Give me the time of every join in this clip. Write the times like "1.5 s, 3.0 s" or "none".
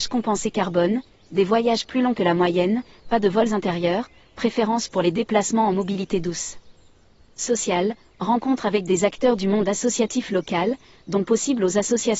none